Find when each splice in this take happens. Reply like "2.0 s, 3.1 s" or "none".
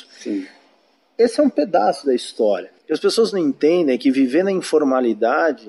2.8 s